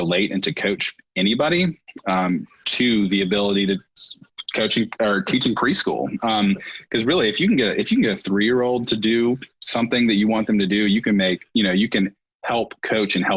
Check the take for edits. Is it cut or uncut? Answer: uncut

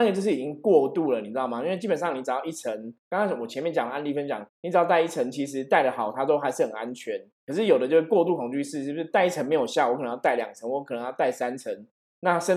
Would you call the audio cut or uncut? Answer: cut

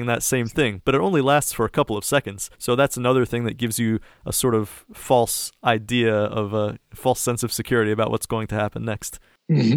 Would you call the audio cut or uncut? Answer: cut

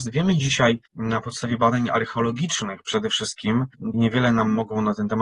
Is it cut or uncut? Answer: cut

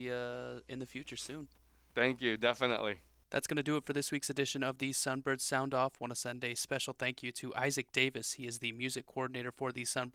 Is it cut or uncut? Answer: uncut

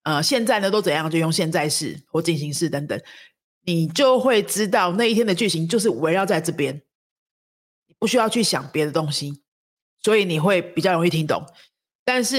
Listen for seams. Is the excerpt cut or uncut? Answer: uncut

